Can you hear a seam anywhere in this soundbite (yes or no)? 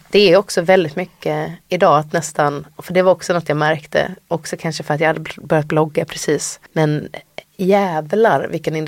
yes